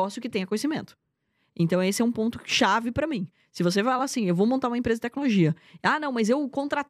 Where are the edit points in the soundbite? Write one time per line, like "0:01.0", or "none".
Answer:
none